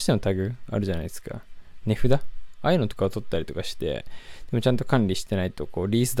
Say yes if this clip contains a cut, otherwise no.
no